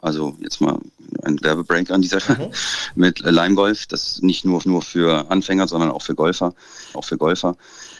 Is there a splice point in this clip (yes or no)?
yes